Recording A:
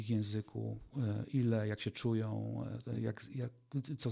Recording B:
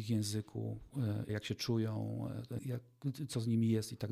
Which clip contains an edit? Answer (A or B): B